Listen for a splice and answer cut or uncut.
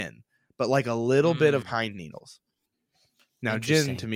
cut